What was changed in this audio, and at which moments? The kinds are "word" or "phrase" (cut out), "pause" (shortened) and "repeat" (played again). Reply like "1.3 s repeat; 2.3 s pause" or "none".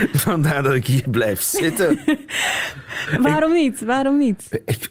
none